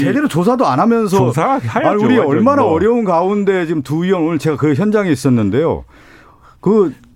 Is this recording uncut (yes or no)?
yes